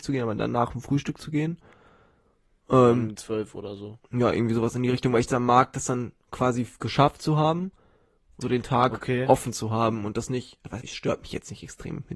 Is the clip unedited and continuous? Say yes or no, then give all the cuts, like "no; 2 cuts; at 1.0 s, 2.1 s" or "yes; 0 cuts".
no; 3 cuts; at 3.1 s, 8.4 s, 10.8 s